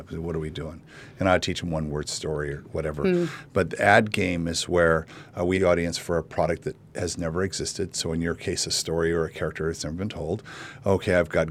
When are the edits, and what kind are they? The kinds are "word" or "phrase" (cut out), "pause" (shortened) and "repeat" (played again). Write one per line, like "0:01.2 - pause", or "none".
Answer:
0:05.5 - word